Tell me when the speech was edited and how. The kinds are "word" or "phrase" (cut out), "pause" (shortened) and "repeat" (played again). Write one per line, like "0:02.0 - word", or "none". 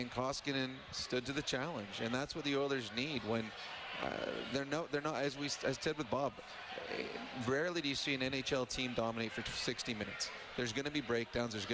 none